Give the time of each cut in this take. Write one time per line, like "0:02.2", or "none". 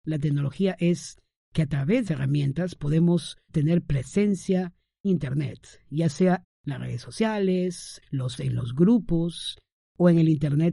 0:02.1
0:03.5
0:05.0
0:06.4
0:08.0
0:08.4